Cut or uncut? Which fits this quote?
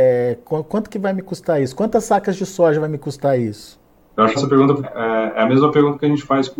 cut